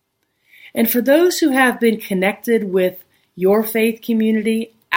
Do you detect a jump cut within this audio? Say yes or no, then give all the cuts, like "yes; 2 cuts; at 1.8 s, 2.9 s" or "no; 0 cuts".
no; 0 cuts